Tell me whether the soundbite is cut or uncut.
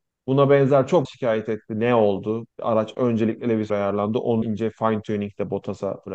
cut